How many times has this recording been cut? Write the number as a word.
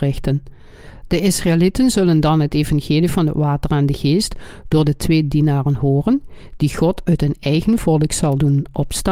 zero